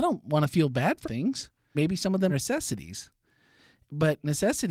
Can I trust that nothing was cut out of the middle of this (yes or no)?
no